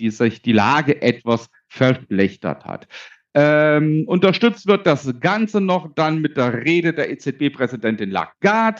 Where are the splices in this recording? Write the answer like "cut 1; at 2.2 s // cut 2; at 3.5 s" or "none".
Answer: none